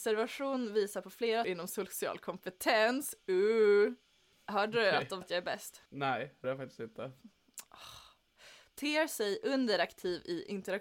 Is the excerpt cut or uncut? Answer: cut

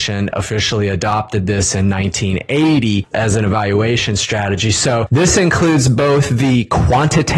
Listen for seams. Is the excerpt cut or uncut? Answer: uncut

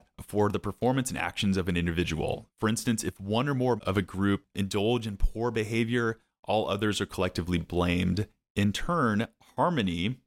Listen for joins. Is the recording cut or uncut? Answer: cut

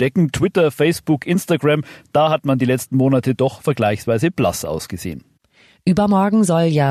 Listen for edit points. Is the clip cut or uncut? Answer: uncut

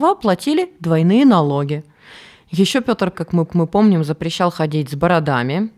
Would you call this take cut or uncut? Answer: cut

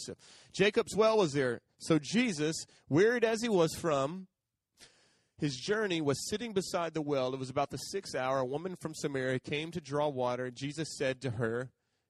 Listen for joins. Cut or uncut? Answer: uncut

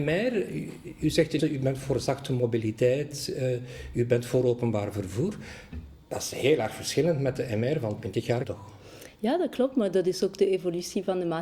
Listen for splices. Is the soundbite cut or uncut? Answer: cut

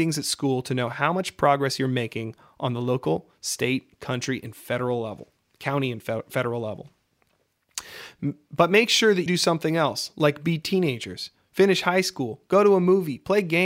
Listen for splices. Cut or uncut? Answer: cut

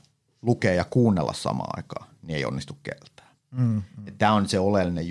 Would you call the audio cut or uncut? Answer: uncut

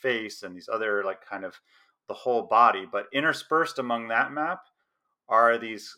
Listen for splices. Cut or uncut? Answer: uncut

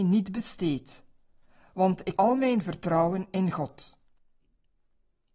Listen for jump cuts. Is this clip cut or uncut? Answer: cut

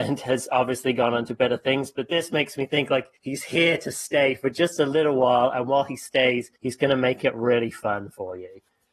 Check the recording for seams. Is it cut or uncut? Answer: cut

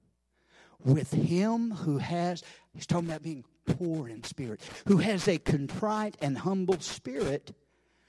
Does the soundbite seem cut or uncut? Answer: uncut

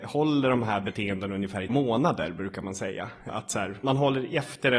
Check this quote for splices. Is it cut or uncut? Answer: cut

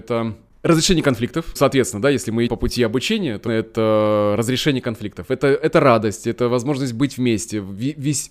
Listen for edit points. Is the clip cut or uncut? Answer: cut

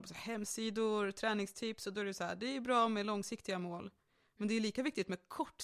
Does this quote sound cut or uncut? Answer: uncut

